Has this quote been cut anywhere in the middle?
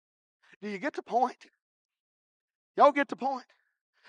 no; 0 cuts

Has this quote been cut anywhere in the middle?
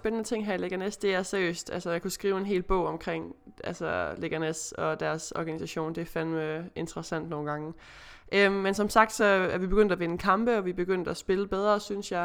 no; 0 cuts

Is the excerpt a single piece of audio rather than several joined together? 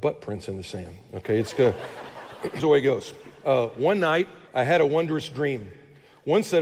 no; 2 cuts; at 2.6 s, 4.5 s

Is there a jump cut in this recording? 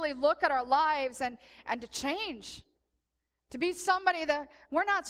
no; 0 cuts

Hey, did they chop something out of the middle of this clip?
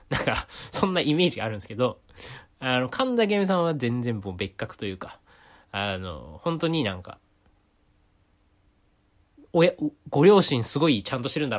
no; 0 cuts

